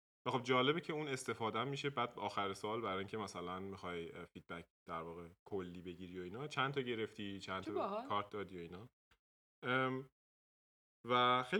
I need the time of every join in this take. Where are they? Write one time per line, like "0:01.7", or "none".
none

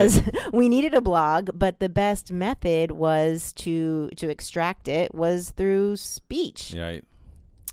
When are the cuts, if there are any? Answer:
none

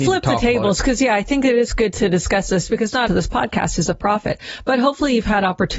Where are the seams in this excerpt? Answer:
0:03.1

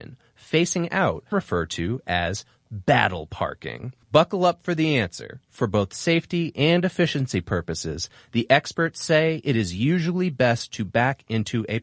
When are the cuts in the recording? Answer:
0:01.3
0:04.0

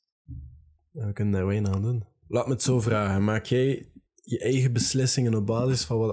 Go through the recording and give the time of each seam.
0:04.1

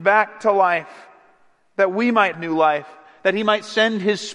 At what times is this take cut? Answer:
0:02.3

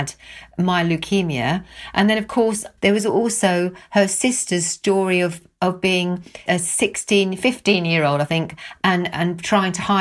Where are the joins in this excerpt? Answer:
0:02.8
0:06.5

